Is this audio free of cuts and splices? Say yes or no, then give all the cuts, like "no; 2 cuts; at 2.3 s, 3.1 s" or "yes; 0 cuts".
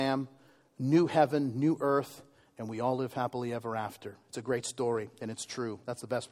yes; 0 cuts